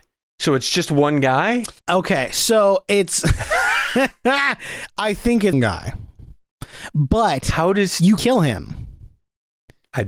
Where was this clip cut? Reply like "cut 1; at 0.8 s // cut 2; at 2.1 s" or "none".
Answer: cut 1; at 1.8 s // cut 2; at 5.5 s // cut 3; at 8.2 s